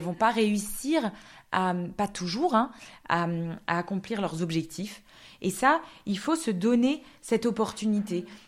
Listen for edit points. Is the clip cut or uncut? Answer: uncut